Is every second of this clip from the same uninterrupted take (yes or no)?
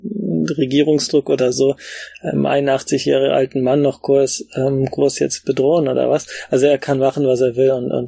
yes